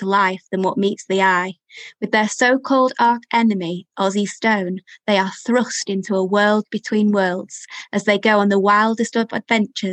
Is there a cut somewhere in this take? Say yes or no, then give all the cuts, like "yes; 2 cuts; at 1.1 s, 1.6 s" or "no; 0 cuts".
no; 0 cuts